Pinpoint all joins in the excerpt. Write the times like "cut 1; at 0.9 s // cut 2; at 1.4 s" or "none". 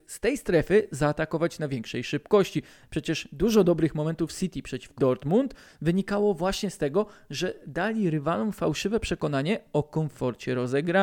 cut 1; at 5.0 s